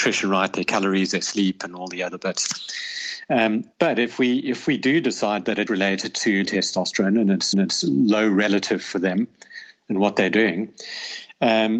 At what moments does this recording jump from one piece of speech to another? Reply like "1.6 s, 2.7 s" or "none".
3.7 s, 5.7 s, 6.4 s, 7.5 s